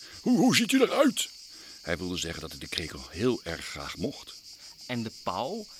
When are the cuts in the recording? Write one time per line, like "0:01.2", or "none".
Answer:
none